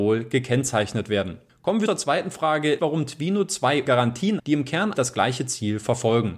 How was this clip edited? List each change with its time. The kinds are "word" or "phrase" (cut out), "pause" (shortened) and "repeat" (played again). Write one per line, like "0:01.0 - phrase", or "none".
0:01.9 - word
0:02.8 - word
0:03.9 - word
0:04.4 - word
0:04.9 - word